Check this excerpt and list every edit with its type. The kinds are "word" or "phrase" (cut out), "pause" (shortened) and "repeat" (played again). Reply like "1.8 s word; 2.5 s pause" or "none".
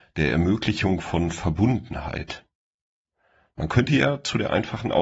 none

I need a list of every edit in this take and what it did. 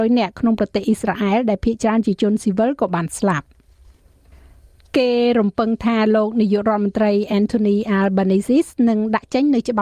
none

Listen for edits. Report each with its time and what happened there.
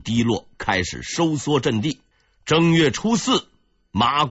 2.1 s pause

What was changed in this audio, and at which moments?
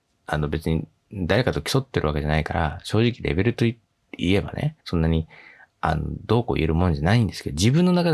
4.8 s pause

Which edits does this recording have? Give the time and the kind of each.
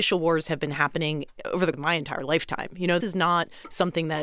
1.7 s word; 3.0 s word

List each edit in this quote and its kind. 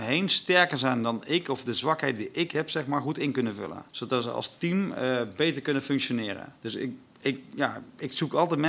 3.9 s pause; 6.6 s pause

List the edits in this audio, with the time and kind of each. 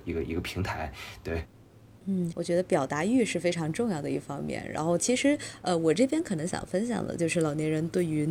2.3 s phrase

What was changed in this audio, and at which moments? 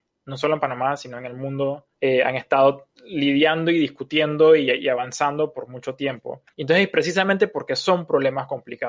1.9 s pause; 6.5 s pause

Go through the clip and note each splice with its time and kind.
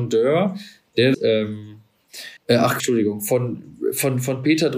1.1 s phrase; 2.4 s pause; 2.8 s word

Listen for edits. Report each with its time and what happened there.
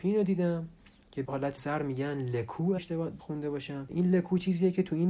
1.2 s word; 1.6 s word; 2.8 s word; 3.2 s word; 3.9 s word

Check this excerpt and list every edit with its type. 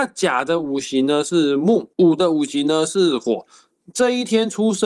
1.9 s pause

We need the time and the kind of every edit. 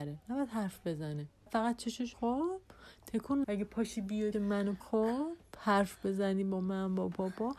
1.5 s word; 2.1 s word; 3.4 s word; 4.3 s word; 4.8 s word

